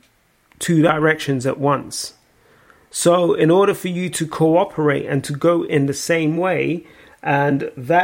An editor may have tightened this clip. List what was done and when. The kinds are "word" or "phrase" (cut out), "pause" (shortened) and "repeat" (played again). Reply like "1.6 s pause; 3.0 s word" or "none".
none